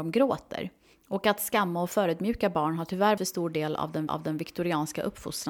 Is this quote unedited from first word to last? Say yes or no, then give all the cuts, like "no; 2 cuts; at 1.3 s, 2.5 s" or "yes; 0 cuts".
no; 3 cuts; at 0.9 s, 3.2 s, 4.1 s